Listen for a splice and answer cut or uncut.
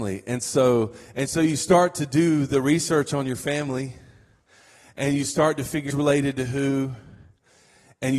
cut